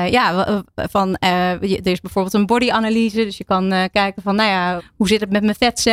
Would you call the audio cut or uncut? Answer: cut